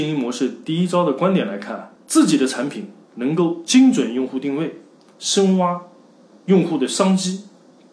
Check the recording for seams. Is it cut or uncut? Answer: cut